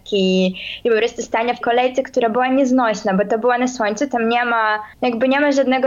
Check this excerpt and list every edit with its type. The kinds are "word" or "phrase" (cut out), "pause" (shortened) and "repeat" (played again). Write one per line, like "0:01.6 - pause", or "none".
0:01.6 - word
0:04.9 - pause